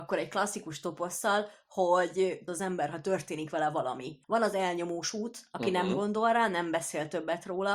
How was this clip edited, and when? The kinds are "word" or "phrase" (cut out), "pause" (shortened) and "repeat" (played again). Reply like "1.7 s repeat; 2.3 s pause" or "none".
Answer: 2.5 s phrase; 4.2 s pause